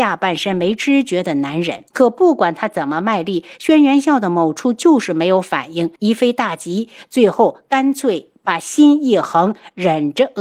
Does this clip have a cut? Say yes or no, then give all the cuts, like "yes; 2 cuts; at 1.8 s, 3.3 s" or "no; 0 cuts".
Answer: yes; 2 cuts; at 1.9 s, 5.9 s